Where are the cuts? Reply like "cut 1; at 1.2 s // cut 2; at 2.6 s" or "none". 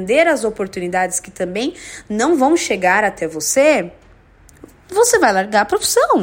none